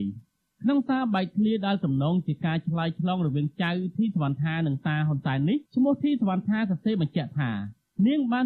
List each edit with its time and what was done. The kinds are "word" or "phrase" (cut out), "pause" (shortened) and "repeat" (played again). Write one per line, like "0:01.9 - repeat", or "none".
0:05.7 - pause